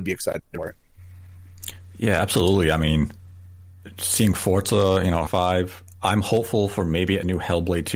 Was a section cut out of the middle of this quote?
yes; 1 cut; at 5.3 s

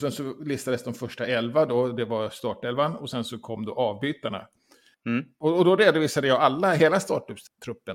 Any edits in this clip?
no; 0 cuts

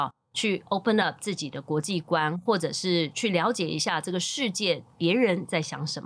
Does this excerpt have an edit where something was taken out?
no; 0 cuts

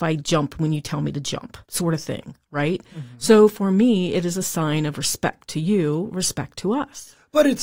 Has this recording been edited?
yes; 1 cut; at 1.6 s

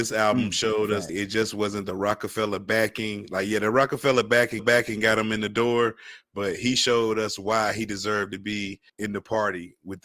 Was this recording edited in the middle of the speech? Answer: yes; 3 cuts; at 1.1 s, 4.6 s, 8.9 s

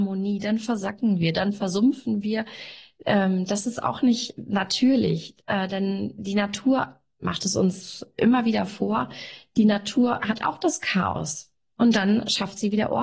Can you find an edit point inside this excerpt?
no; 0 cuts

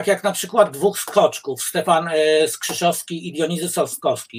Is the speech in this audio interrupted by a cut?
no; 0 cuts

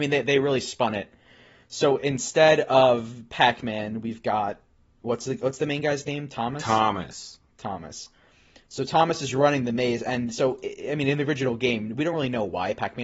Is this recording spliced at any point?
no; 0 cuts

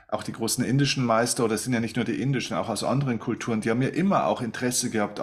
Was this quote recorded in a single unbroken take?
yes; 0 cuts

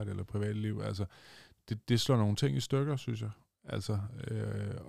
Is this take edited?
no; 0 cuts

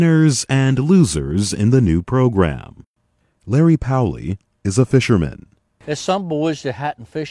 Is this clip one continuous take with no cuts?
yes; 0 cuts

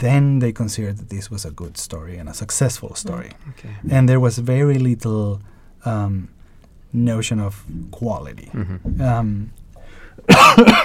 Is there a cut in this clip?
no; 0 cuts

